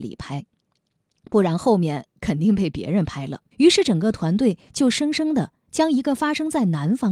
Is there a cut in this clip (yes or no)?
yes